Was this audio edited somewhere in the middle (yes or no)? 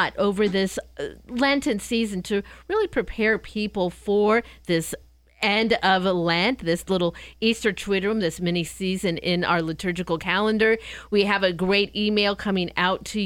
no